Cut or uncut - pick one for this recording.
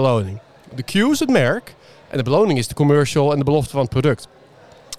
uncut